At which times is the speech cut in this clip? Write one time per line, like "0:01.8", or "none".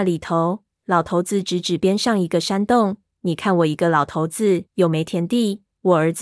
0:04.7